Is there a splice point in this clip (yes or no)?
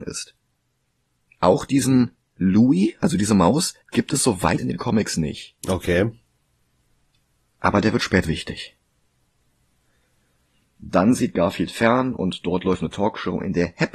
yes